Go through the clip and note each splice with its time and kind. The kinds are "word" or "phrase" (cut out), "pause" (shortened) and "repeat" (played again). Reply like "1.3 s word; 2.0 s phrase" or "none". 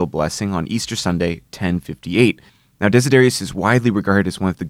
2.5 s pause